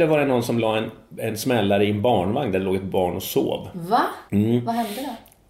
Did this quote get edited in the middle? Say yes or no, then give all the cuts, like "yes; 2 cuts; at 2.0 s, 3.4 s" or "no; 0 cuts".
yes; 1 cut; at 4.3 s